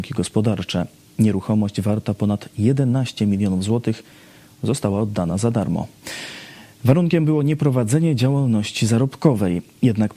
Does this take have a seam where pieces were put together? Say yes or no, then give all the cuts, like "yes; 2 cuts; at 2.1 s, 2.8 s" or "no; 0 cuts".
no; 0 cuts